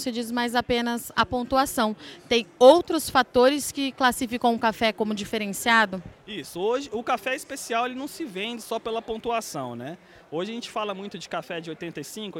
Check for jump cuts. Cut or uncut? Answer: uncut